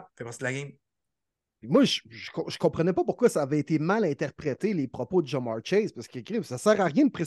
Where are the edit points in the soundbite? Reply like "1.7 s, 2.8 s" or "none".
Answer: none